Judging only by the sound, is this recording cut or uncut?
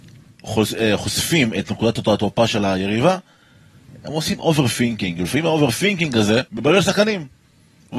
cut